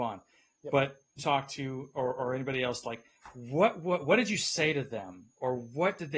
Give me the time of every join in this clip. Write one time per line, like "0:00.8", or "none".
0:01.2